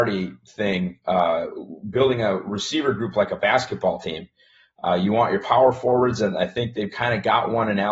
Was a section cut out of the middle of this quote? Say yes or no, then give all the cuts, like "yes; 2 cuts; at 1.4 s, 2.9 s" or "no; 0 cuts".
no; 0 cuts